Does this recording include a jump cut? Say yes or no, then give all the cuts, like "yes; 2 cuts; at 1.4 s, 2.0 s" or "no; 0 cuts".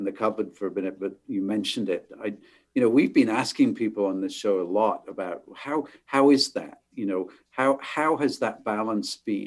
no; 0 cuts